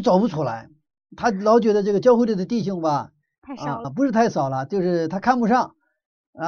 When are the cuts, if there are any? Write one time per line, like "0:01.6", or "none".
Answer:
0:03.8